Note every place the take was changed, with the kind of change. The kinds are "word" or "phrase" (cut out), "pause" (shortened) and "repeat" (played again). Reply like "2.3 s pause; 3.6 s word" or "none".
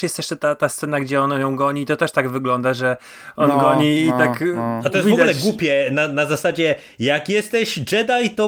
none